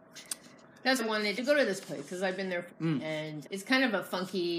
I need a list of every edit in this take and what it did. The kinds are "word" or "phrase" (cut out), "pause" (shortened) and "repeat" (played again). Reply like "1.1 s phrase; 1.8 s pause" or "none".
1.0 s word; 1.4 s word; 2.7 s word; 3.4 s word